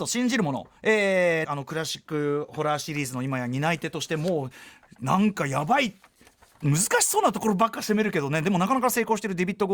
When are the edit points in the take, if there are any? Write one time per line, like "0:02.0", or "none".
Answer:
0:01.4